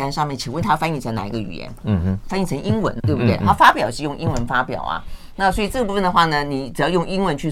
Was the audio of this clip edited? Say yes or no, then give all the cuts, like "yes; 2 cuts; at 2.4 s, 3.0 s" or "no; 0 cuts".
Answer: yes; 1 cut; at 3.0 s